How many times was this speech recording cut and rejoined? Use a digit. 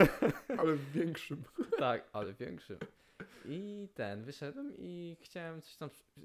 0